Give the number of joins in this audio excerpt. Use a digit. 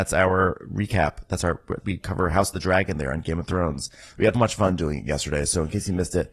2